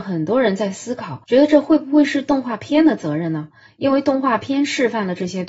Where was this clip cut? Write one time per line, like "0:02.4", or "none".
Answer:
0:01.2